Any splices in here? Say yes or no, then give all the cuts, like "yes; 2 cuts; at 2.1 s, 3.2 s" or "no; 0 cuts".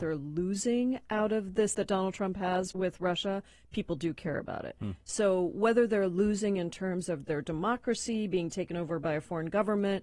yes; 2 cuts; at 1.7 s, 2.7 s